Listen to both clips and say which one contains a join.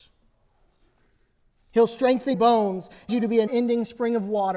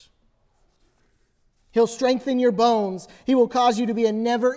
first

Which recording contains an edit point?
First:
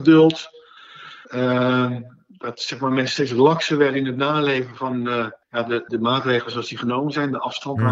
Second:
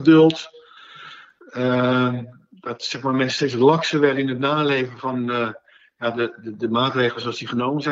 first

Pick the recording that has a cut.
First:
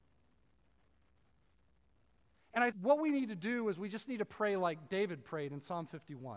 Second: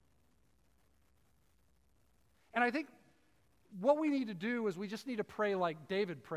first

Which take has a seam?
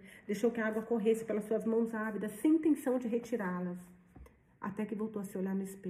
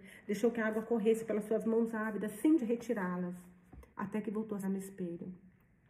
second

